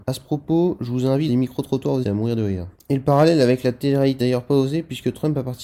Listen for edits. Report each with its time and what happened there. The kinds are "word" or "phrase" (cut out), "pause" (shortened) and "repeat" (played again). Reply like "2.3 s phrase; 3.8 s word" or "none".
1.3 s phrase; 2.0 s phrase; 4.2 s word